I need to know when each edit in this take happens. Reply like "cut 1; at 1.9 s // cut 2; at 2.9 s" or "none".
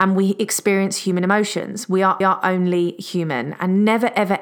cut 1; at 2.2 s